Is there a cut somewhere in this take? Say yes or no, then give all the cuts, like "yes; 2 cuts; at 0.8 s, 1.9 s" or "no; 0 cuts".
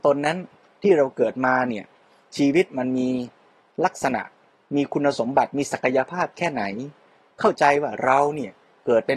no; 0 cuts